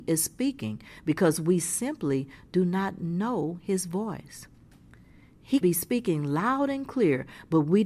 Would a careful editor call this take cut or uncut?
cut